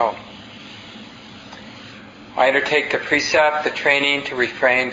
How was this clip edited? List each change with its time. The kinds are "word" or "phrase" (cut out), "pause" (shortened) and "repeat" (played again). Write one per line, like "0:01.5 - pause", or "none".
none

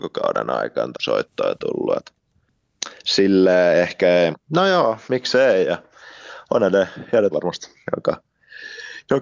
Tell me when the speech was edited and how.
0:00.9 - word
0:04.3 - word
0:05.0 - word
0:07.3 - word

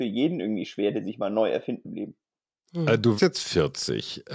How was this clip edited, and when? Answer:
0:01.8 - word
0:03.2 - word

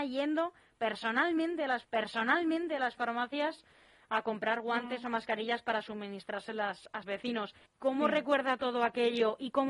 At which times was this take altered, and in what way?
0:01.8 - repeat
0:07.0 - word
0:07.7 - pause

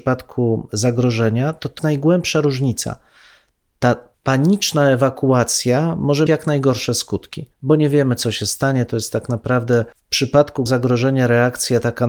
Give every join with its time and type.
0:01.8 - word
0:04.1 - pause
0:06.3 - word
0:07.5 - pause
0:09.9 - pause
0:10.7 - word

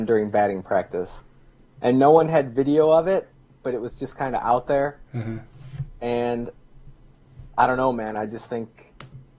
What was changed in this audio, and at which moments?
none

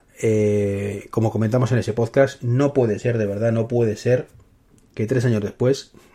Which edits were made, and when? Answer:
none

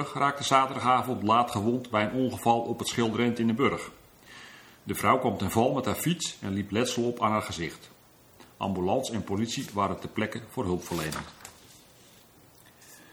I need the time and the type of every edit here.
none

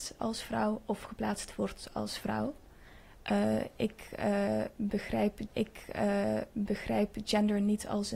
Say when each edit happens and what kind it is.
0:05.5 - repeat

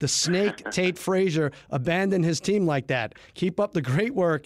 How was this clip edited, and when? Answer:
none

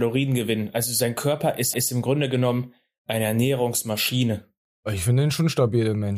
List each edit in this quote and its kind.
0:01.7 - repeat
0:04.7 - pause

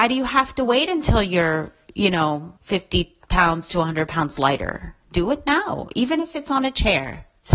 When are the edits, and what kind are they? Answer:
0:02.6 - pause

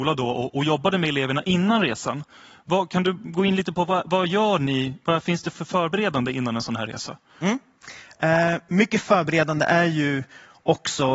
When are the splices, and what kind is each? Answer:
none

